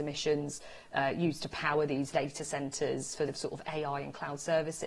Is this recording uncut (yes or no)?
no